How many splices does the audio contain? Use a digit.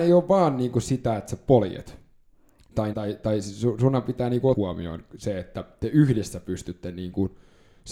2